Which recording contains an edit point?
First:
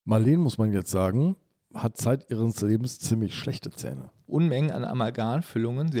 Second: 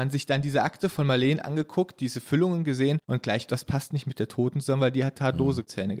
second; 2 cuts; at 3.0 s, 3.5 s

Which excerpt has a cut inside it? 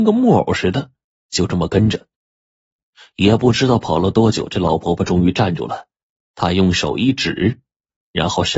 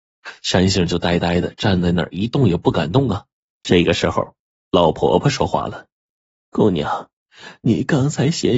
second; 1 cut; at 3.4 s

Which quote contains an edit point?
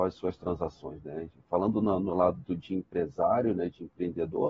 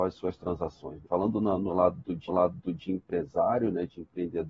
second; 2 cuts; at 1.0 s, 2.3 s

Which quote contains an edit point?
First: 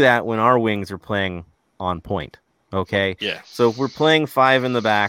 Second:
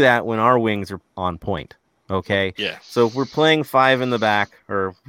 second; 1 cut; at 1.0 s

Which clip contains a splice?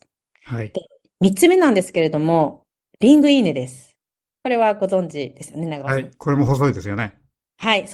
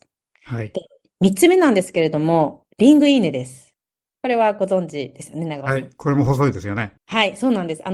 second; 2 cuts; at 2.7 s, 7.0 s

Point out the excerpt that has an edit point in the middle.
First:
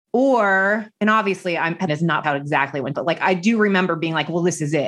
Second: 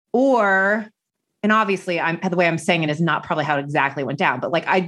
first; 4 cuts; at 1.0 s, 1.9 s, 2.2 s, 2.9 s

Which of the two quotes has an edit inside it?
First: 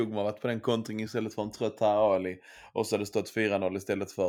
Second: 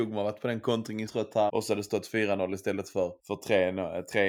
second; 3 cuts; at 1.1 s, 1.5 s, 3.2 s

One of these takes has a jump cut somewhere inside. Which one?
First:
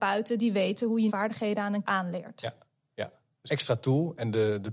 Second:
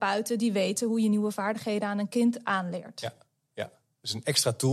first; 3 cuts; at 1.1 s, 1.8 s, 3.5 s

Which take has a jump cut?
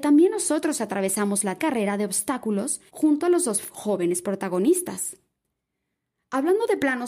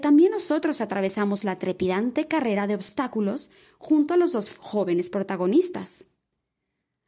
first; 2 cuts; at 1.6 s, 2.9 s

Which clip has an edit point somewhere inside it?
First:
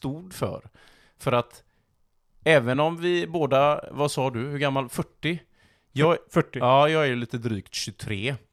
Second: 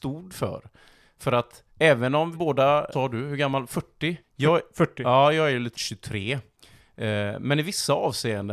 second; 5 cuts; at 1.7 s, 2.3 s, 2.9 s, 4.2 s, 5.7 s

